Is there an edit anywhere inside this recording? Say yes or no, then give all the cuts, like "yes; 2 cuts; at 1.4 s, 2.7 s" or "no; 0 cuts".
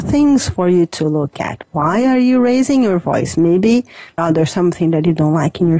yes; 1 cut; at 4.2 s